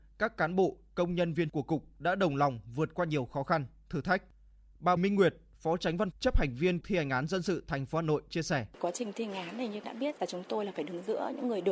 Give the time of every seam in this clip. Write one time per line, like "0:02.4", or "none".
0:01.5
0:05.0
0:06.1
0:06.8
0:09.8
0:10.2